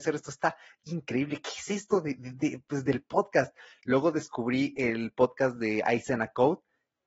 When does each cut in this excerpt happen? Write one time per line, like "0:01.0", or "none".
none